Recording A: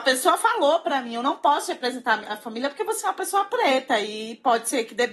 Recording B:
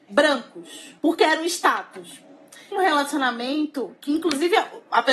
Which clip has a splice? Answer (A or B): B